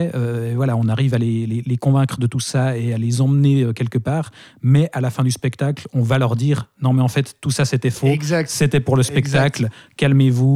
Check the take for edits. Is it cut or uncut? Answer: uncut